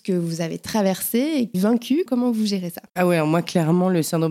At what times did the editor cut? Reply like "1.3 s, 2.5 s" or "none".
1.5 s, 2.1 s, 2.9 s

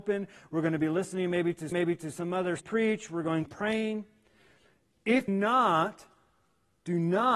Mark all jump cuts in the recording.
1.7 s, 2.6 s, 3.4 s, 5.3 s

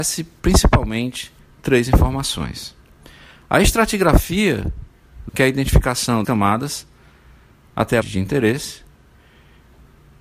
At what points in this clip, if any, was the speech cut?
1.5 s, 5.3 s, 6.2 s, 8.0 s

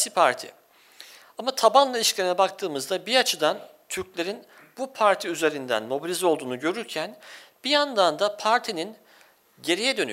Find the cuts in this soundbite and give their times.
none

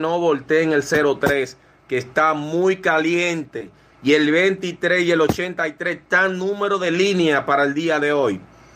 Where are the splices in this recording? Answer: none

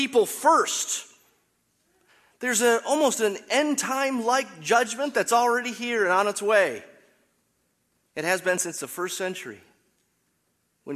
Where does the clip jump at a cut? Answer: none

